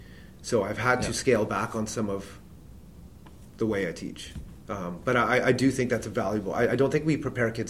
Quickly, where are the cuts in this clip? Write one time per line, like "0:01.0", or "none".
none